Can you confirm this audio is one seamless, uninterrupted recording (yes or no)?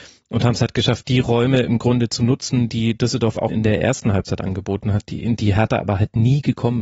no